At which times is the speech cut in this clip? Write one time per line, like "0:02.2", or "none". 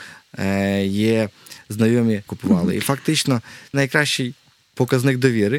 0:02.3
0:03.7